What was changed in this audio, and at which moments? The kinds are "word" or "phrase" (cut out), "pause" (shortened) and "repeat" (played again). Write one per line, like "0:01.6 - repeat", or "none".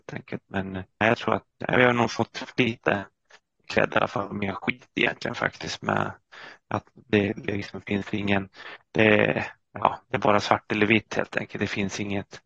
0:01.0 - word
0:01.5 - word
0:02.6 - word
0:03.6 - word